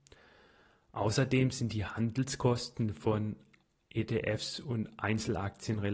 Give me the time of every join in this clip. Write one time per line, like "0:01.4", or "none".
none